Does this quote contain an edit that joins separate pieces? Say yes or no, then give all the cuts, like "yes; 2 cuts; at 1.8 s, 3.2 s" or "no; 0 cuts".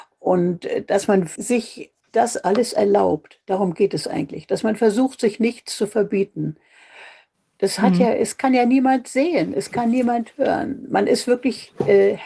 yes; 2 cuts; at 1.4 s, 2.0 s